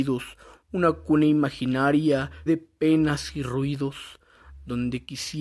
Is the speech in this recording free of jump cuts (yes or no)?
no